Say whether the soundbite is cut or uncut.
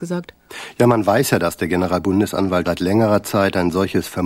cut